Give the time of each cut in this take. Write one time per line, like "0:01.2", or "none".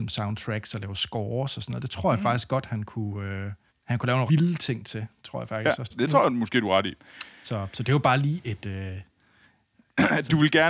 0:03.7
0:04.3
0:05.9